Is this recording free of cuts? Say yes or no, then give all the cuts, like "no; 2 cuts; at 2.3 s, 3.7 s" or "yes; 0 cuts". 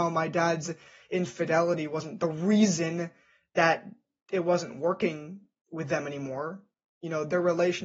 yes; 0 cuts